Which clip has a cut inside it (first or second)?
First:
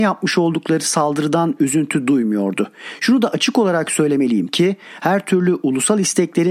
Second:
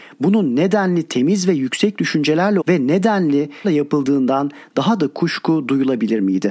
second